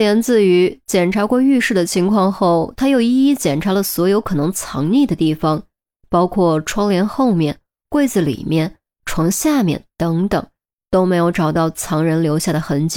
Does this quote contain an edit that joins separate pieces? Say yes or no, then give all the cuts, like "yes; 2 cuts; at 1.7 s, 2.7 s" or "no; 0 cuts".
no; 0 cuts